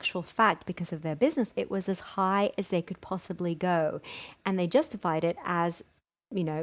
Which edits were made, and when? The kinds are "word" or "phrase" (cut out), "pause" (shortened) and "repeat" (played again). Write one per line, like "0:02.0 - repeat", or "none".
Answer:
0:01.5 - word